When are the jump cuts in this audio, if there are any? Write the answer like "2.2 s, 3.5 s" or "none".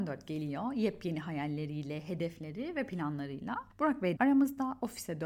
4.2 s